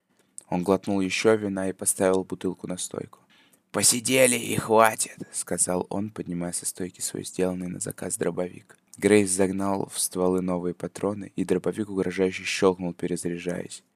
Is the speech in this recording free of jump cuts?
no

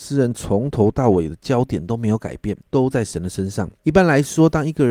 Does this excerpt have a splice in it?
yes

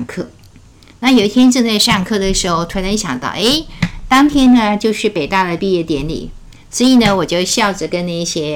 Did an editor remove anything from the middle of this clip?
no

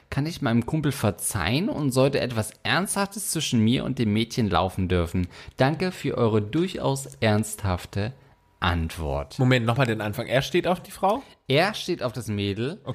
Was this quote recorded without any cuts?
yes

